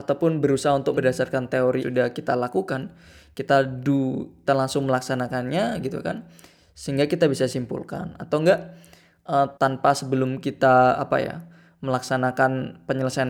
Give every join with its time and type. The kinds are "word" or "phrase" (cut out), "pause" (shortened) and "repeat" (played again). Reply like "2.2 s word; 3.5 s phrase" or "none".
1.0 s word; 1.8 s phrase; 4.5 s word; 9.6 s pause